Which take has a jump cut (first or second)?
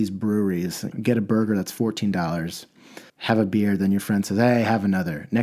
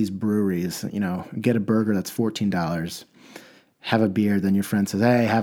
first